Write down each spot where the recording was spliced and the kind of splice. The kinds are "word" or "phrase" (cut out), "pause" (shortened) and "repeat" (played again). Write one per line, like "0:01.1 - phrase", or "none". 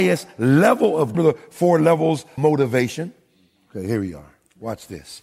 0:01.1 - phrase
0:02.4 - word